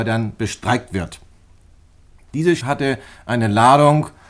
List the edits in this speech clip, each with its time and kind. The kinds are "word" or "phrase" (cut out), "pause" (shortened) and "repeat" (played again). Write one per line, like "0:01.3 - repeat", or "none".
0:02.6 - word